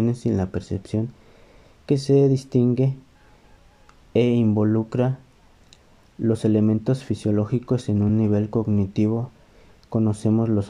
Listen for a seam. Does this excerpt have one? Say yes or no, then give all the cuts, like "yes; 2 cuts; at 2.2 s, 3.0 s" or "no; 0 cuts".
no; 0 cuts